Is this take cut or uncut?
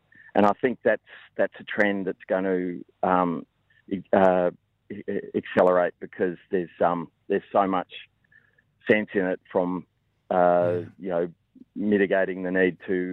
uncut